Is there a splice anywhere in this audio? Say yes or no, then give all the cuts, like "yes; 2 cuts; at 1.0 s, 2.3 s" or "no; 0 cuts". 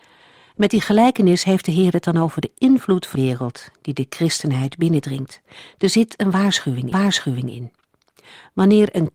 yes; 2 cuts; at 3.1 s, 6.9 s